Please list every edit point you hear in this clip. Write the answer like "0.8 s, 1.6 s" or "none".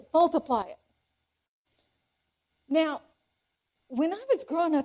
none